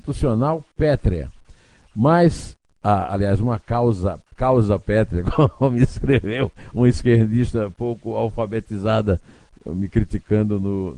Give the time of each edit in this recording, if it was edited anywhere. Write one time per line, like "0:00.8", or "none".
none